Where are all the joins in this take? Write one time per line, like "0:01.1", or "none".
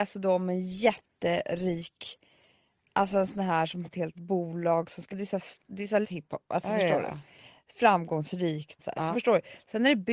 0:03.8
0:04.1
0:05.1
0:06.0
0:08.8
0:09.1